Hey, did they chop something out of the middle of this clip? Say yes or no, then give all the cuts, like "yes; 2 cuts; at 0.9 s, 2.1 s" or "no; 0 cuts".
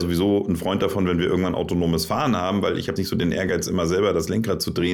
yes; 1 cut; at 3.0 s